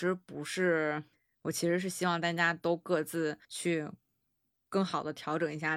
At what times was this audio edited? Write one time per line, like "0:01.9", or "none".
0:01.1
0:03.4